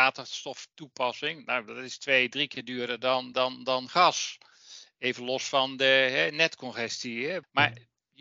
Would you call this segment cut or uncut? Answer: uncut